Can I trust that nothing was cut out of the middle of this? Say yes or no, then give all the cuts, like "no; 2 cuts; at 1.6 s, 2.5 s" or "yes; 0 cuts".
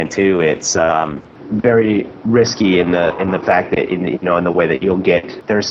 yes; 0 cuts